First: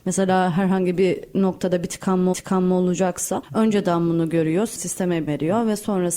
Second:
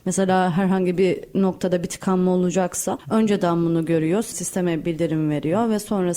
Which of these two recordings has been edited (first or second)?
first